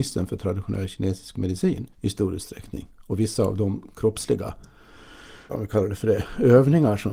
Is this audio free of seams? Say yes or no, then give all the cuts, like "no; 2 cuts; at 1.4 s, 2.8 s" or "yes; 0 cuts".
no; 2 cuts; at 1.9 s, 5.5 s